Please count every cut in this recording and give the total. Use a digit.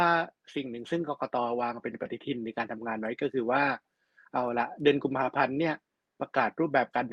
0